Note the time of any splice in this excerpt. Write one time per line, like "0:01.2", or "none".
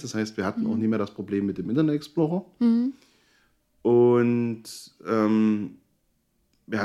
none